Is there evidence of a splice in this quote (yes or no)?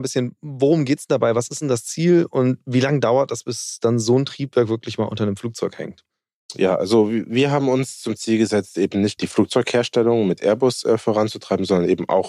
yes